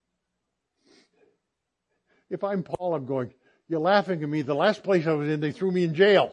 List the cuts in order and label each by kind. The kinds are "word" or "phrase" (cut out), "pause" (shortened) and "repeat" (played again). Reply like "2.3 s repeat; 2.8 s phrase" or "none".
none

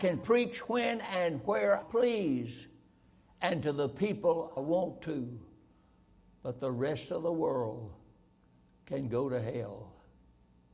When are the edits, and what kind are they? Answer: 1.8 s word; 4.6 s word

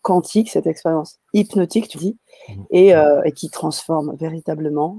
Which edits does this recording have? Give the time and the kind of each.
1.9 s word

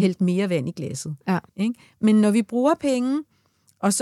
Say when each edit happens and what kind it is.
1.5 s pause

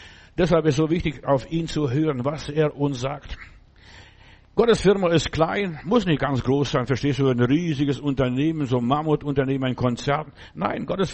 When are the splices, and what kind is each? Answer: none

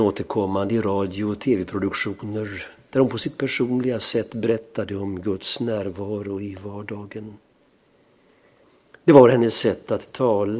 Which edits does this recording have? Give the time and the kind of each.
none

